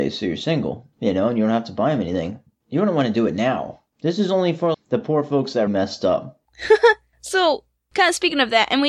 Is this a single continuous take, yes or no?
no